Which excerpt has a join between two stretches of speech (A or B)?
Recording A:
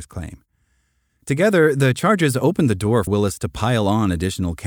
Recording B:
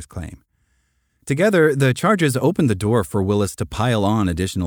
A